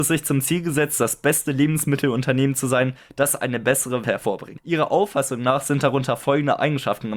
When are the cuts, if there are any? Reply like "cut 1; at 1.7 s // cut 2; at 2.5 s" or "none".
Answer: cut 1; at 4.0 s